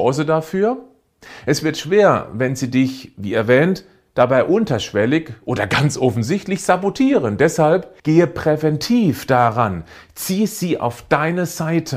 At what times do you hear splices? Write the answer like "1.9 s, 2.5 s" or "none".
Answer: 8.0 s